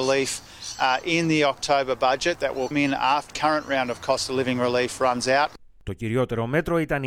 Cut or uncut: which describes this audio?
cut